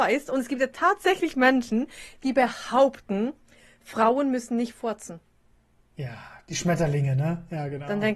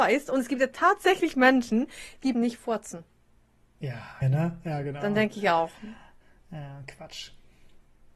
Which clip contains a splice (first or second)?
second